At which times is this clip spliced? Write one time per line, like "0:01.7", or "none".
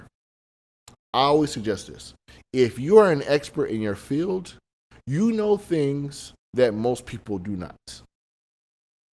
none